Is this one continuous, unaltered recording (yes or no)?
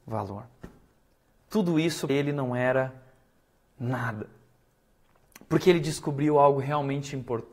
no